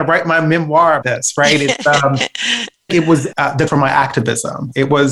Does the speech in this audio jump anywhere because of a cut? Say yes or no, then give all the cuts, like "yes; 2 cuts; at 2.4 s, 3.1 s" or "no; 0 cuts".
yes; 4 cuts; at 1.0 s, 2.9 s, 3.3 s, 3.7 s